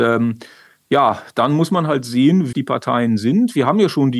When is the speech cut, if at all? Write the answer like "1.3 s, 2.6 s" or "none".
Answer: 2.5 s

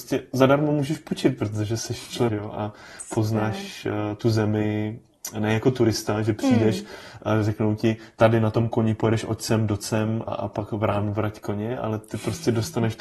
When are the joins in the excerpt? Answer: 2.3 s, 10.3 s

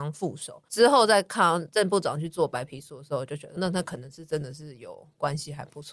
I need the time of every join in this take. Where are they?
3.6 s

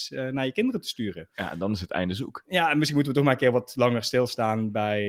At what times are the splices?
none

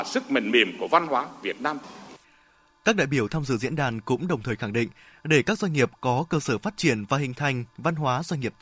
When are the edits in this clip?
none

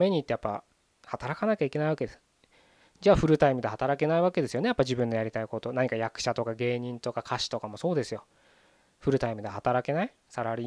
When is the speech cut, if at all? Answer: none

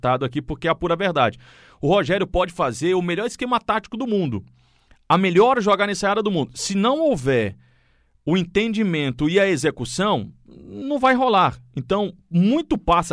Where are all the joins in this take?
none

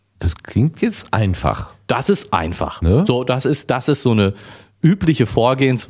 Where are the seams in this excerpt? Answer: none

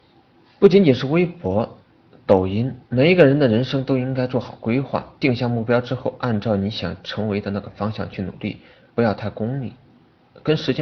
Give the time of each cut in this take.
2.9 s, 5.2 s

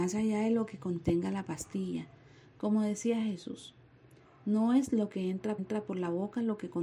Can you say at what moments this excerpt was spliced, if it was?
5.6 s

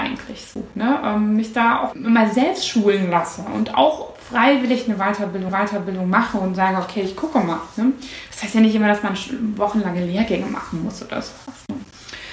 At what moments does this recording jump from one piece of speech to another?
1.9 s, 5.5 s

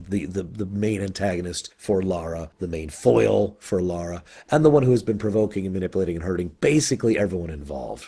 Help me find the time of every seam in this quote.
1.7 s, 2.5 s

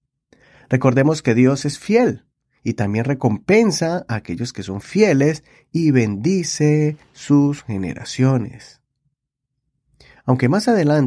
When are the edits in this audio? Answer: none

